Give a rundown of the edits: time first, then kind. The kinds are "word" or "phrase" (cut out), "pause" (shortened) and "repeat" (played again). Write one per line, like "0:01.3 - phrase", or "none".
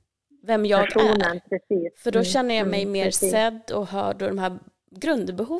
none